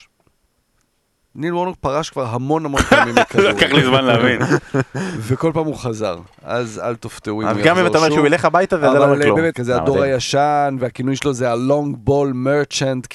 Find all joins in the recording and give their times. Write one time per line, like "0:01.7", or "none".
0:09.5